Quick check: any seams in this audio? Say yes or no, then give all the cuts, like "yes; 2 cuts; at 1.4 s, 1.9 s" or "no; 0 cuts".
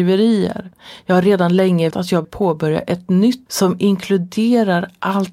yes; 3 cuts; at 1.9 s, 2.2 s, 3.5 s